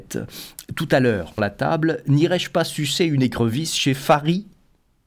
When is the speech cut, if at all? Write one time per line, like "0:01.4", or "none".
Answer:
0:01.4